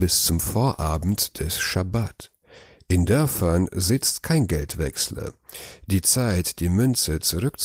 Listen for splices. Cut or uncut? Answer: uncut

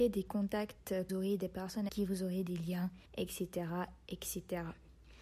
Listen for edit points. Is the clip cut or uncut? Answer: cut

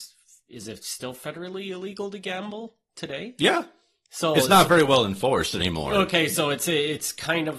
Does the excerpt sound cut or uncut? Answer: uncut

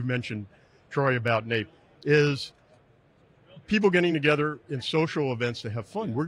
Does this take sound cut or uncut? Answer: uncut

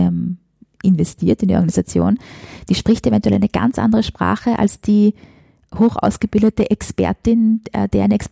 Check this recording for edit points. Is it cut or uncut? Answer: uncut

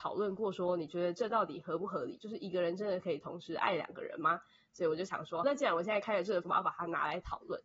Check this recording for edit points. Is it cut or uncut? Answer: cut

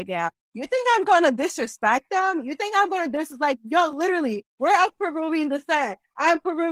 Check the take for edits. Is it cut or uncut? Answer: uncut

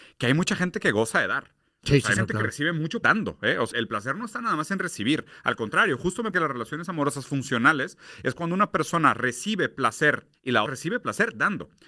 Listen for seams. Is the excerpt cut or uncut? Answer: cut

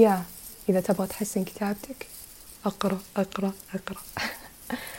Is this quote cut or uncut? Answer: uncut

